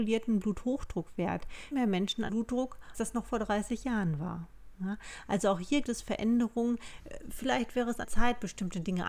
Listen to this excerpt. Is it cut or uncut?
cut